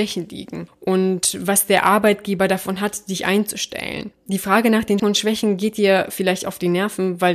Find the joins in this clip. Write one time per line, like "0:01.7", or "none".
0:05.0